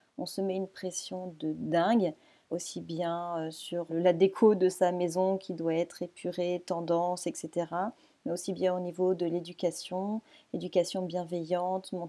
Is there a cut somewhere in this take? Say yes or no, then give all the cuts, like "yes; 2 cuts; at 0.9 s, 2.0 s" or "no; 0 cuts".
yes; 2 cuts; at 2.5 s, 3.9 s